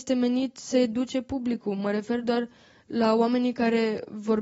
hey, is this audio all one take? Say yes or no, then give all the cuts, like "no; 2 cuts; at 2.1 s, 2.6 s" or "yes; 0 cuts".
yes; 0 cuts